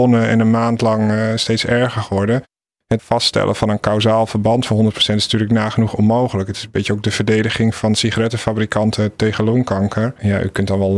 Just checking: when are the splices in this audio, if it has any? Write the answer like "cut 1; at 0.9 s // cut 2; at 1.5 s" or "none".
none